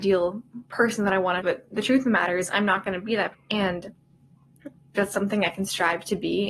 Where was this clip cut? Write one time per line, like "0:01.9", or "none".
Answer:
0:01.4
0:03.3
0:05.0